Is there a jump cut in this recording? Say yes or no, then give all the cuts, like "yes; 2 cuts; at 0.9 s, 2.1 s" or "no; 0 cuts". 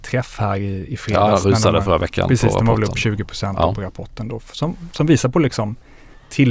no; 0 cuts